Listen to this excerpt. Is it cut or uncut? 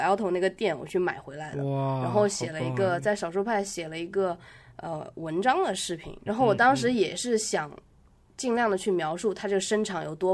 cut